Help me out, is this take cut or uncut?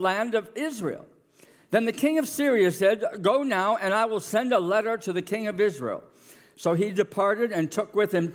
uncut